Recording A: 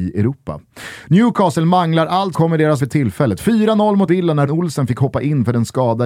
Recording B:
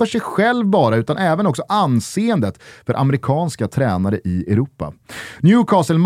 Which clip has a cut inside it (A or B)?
A